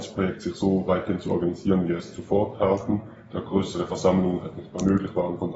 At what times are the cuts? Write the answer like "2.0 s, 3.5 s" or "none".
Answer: none